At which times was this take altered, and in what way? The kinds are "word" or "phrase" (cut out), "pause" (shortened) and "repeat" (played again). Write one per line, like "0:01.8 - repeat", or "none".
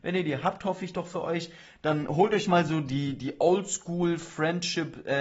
none